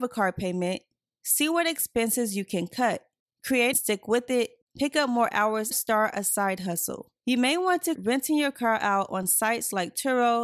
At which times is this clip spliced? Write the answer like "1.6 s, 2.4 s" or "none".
3.7 s, 5.7 s, 7.2 s, 7.9 s